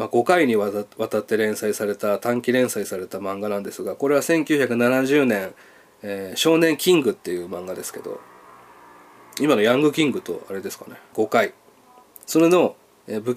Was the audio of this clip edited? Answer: yes; 2 cuts; at 5.6 s, 11.1 s

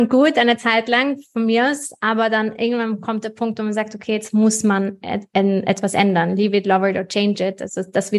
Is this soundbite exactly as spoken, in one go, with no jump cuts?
yes; 0 cuts

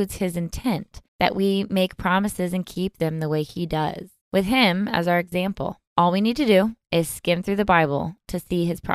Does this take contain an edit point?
yes; 3 cuts; at 1.1 s, 4.2 s, 5.9 s

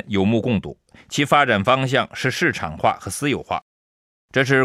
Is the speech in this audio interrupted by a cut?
no; 0 cuts

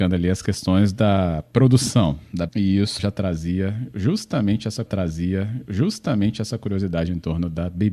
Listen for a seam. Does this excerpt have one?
yes; 3 cuts; at 2.5 s, 3.0 s, 4.9 s

